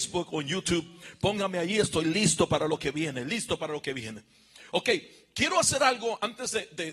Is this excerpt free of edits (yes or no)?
yes